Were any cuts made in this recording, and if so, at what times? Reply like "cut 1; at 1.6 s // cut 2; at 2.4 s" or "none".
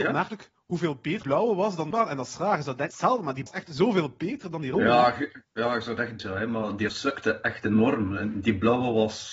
cut 1; at 1.2 s // cut 2; at 1.9 s // cut 3; at 2.9 s // cut 4; at 3.5 s // cut 5; at 6.2 s // cut 6; at 6.9 s